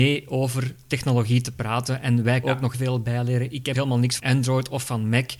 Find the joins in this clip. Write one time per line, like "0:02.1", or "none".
0:02.4
0:02.7
0:03.7
0:04.2